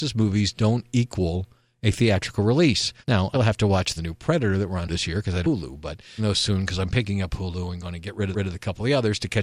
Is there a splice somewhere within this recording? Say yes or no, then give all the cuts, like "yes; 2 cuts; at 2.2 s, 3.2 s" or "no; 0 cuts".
yes; 7 cuts; at 3.0 s, 3.3 s, 4.0 s, 4.9 s, 5.4 s, 6.2 s, 8.3 s